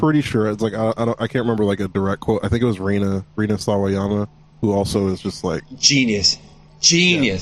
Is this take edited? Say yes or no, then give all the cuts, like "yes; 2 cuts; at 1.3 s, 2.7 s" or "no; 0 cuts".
no; 0 cuts